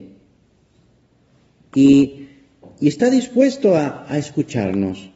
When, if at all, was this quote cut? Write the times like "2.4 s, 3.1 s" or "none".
none